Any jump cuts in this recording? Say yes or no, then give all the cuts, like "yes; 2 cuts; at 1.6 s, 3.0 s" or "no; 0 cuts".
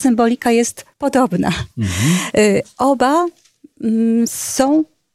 yes; 1 cut; at 0.9 s